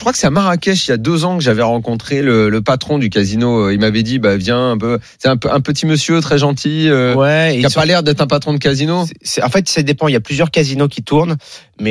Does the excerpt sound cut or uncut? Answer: uncut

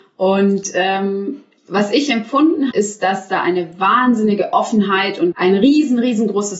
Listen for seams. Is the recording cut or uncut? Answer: cut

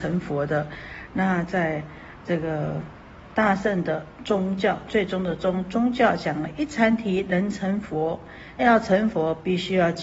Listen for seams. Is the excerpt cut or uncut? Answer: cut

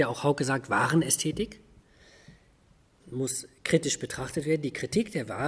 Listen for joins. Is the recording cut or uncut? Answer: cut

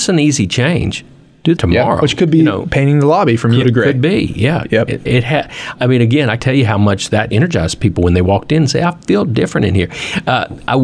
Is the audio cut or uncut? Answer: cut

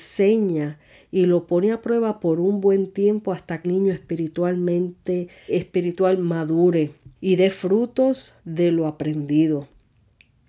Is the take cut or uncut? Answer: cut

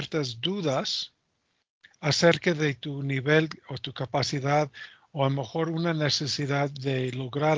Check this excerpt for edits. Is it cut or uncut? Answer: uncut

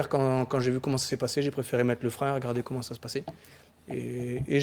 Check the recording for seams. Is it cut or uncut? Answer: uncut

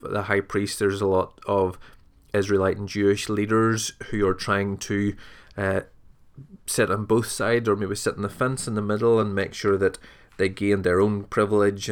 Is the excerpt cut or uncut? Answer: uncut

